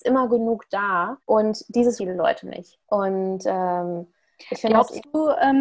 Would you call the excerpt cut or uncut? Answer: cut